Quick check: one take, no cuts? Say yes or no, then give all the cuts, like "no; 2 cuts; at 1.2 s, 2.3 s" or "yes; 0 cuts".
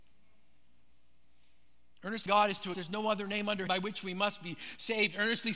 no; 3 cuts; at 2.3 s, 2.7 s, 3.7 s